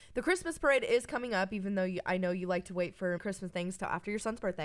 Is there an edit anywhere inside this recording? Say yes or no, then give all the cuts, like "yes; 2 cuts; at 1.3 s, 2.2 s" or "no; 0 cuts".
yes; 1 cut; at 3.2 s